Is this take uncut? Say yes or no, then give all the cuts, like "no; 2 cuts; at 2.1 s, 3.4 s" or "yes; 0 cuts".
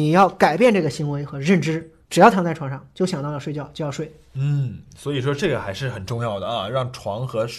yes; 0 cuts